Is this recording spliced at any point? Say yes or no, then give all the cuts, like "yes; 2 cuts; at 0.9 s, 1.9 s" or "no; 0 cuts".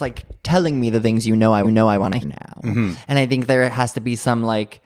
yes; 2 cuts; at 1.6 s, 2.2 s